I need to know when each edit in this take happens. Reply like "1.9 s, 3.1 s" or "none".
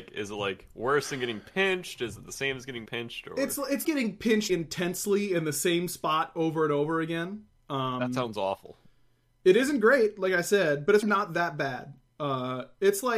2.9 s, 3.8 s, 4.5 s, 11.0 s